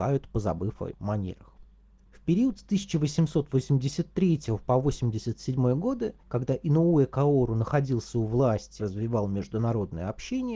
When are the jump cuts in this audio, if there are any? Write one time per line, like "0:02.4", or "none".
0:00.9
0:06.2
0:08.8